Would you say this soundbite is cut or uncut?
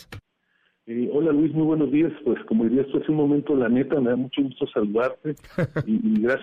uncut